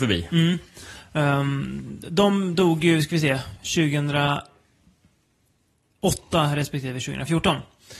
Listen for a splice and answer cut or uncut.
uncut